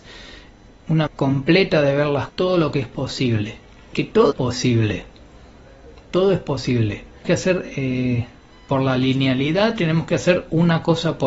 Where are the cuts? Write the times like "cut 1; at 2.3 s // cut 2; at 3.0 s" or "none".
cut 1; at 1.1 s // cut 2; at 2.3 s // cut 3; at 3.9 s // cut 4; at 4.3 s // cut 5; at 7.2 s // cut 6; at 8.6 s